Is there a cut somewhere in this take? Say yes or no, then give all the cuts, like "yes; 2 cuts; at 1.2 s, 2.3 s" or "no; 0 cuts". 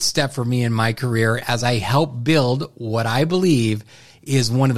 no; 0 cuts